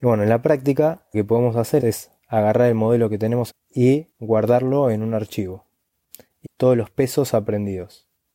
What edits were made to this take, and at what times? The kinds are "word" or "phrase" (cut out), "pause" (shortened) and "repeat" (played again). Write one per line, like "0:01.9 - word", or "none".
0:01.1 - word
0:01.8 - word
0:03.5 - word
0:04.1 - pause
0:06.4 - phrase